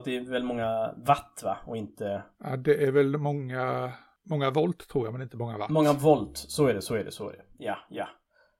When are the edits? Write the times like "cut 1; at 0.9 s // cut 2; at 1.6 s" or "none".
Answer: cut 1; at 2.3 s

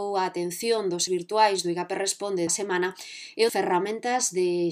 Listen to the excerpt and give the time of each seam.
cut 1; at 1.1 s // cut 2; at 2.5 s // cut 3; at 3.5 s

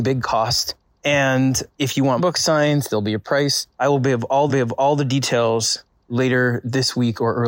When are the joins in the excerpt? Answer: cut 1; at 1.7 s // cut 2; at 2.2 s // cut 3; at 3.7 s // cut 4; at 4.5 s

